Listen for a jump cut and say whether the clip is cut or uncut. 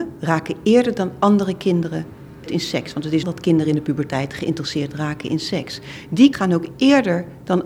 cut